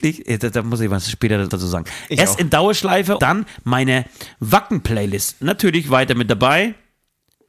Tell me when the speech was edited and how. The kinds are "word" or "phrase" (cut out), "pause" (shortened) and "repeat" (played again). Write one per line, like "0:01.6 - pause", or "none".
0:01.5 - word
0:03.2 - word

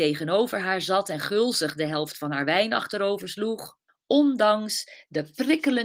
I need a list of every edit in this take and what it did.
0:03.9 - pause

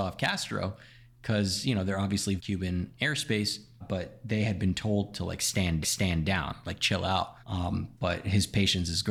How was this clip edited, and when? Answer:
0:02.4 - word
0:03.8 - word
0:05.8 - repeat
0:07.4 - pause

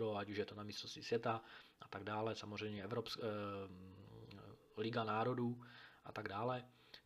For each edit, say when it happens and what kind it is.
none

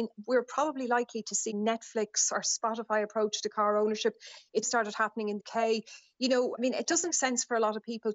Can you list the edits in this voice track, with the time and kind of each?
0:01.5 - phrase
0:04.6 - word
0:05.4 - word
0:06.6 - word
0:07.1 - word

